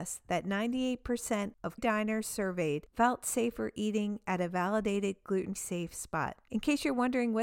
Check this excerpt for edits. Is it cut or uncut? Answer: cut